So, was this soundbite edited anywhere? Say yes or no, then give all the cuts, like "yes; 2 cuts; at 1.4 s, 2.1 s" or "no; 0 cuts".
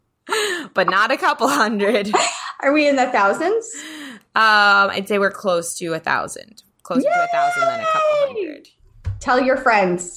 no; 0 cuts